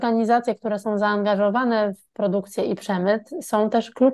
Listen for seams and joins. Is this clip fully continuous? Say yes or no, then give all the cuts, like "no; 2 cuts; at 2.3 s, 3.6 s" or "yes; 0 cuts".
yes; 0 cuts